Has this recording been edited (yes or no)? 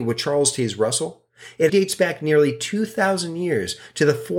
yes